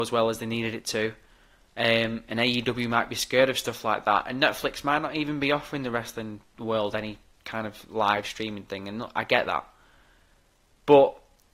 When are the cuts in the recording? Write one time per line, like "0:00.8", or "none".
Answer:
none